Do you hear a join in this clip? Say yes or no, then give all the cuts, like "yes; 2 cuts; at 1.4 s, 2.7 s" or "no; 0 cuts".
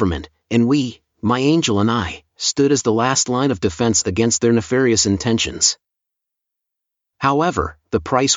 no; 0 cuts